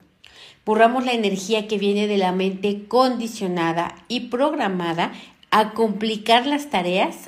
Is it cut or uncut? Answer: uncut